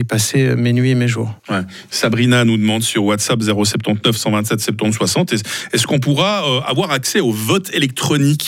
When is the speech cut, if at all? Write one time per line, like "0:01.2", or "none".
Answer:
0:01.4